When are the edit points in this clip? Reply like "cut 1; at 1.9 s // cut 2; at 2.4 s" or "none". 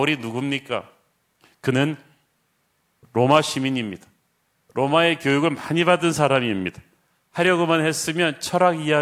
none